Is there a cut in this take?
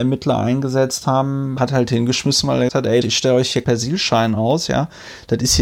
yes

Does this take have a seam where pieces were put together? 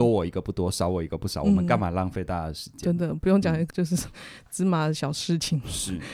yes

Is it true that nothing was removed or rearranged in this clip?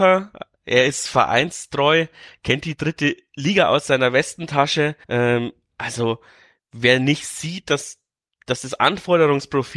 no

